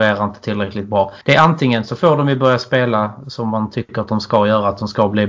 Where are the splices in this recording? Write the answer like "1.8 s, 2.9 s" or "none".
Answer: 1.2 s